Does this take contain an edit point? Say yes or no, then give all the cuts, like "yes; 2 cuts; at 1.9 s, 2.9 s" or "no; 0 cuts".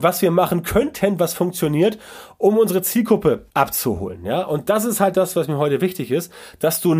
yes; 1 cut; at 3.5 s